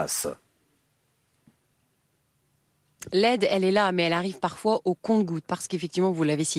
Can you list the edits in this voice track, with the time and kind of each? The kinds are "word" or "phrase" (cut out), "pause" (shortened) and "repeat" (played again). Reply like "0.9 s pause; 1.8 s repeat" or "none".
none